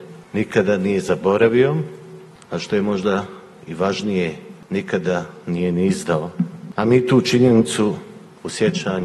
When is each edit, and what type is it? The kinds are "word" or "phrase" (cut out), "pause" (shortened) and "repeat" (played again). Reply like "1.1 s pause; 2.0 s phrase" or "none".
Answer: none